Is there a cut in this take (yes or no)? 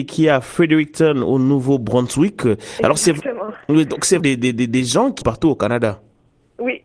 yes